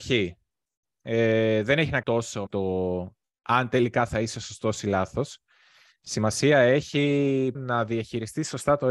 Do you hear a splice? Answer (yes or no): yes